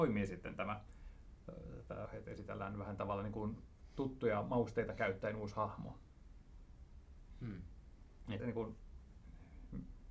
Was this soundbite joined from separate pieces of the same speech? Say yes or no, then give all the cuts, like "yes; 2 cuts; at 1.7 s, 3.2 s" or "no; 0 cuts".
yes; 2 cuts; at 2.1 s, 8.4 s